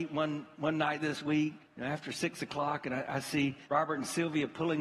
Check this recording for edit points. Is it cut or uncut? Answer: cut